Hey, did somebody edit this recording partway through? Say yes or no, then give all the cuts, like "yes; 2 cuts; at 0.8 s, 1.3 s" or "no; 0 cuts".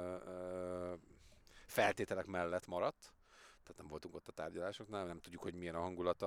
no; 0 cuts